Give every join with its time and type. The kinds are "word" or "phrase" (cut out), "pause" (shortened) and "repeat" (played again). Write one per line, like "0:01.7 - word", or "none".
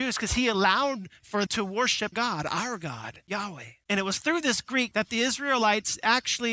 0:01.5 - word
0:02.1 - word
0:04.9 - word